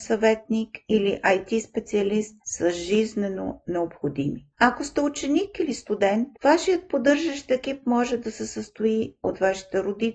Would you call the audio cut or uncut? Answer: cut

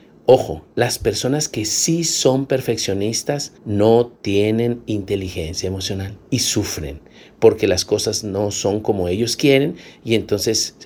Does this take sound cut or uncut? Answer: cut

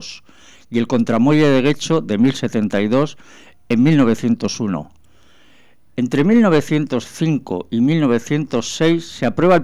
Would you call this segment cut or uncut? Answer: uncut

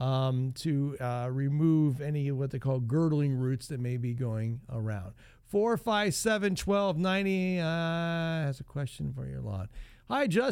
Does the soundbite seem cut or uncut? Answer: uncut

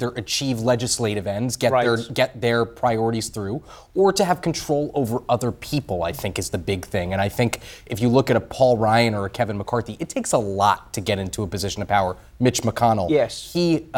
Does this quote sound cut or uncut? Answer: uncut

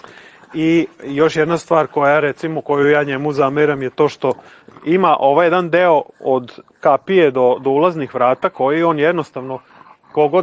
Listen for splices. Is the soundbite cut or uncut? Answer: uncut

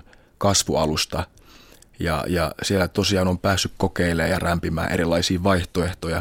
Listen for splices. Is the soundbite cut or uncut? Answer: uncut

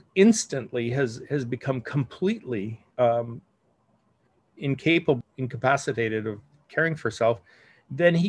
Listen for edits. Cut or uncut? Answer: cut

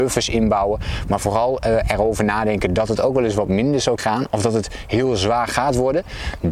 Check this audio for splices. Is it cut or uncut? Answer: cut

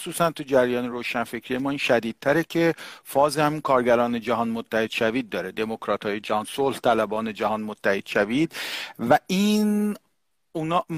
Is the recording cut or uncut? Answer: uncut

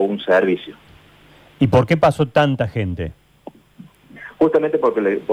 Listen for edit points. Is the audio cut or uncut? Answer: uncut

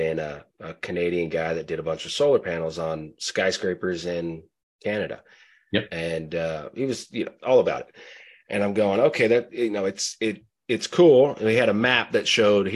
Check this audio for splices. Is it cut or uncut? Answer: uncut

